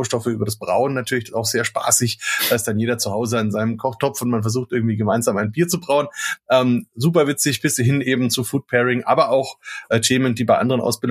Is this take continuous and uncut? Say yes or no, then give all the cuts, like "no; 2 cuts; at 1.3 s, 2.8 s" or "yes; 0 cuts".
yes; 0 cuts